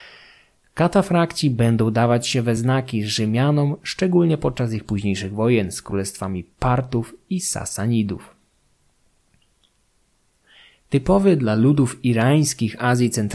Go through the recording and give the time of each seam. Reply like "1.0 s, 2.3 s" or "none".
none